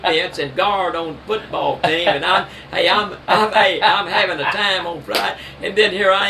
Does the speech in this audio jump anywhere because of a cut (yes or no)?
no